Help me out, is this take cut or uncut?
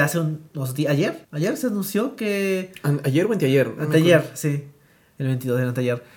cut